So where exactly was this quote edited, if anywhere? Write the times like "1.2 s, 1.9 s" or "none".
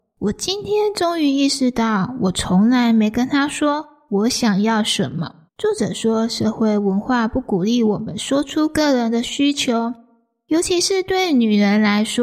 5.5 s